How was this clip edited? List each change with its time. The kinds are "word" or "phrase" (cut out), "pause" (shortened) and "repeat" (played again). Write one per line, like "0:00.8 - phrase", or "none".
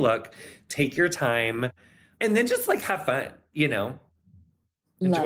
none